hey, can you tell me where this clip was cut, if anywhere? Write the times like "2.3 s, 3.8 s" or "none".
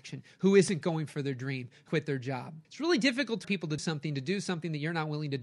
1.9 s, 2.6 s, 3.4 s, 3.8 s